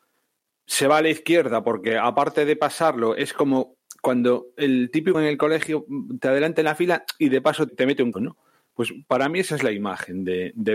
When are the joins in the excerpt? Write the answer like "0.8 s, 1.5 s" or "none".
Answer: 5.1 s, 7.7 s, 8.1 s